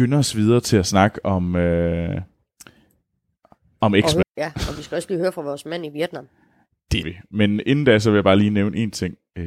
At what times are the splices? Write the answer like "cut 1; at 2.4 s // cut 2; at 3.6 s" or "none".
cut 1; at 4.2 s // cut 2; at 7.0 s

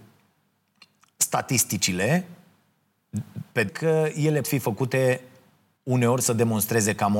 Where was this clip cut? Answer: cut 1; at 3.7 s // cut 2; at 4.4 s

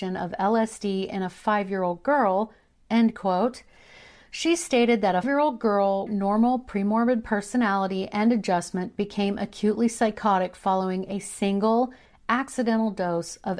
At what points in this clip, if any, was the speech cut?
cut 1; at 5.2 s // cut 2; at 6.1 s

